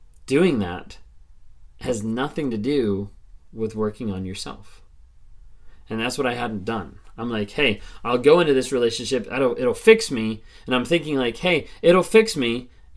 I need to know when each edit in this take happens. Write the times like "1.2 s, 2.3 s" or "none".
none